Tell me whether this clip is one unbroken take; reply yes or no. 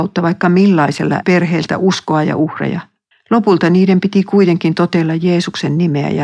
no